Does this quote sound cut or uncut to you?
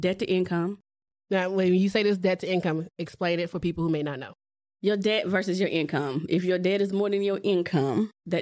uncut